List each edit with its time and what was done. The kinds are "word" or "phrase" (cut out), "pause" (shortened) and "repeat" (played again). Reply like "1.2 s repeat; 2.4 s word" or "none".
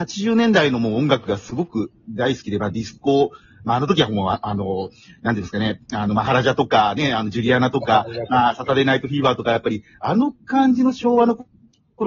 none